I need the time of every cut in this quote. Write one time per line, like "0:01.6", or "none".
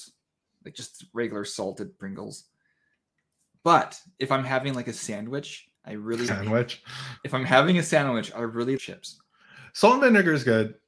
0:05.7
0:06.3
0:07.2
0:08.8